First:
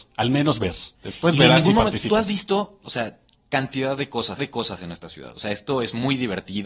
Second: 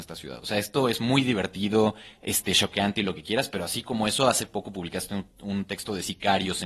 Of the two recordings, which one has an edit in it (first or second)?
first